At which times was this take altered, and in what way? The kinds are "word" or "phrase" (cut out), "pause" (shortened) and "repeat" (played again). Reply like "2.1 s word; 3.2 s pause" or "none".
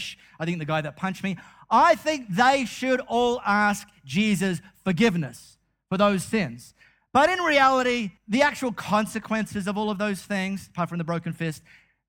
8.2 s pause